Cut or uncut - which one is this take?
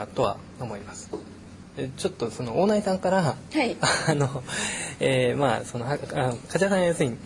uncut